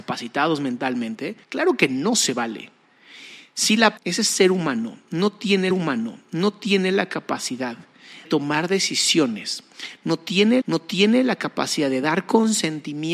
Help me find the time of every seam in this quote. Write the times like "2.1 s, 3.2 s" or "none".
1.4 s, 4.0 s, 5.7 s, 8.2 s, 10.6 s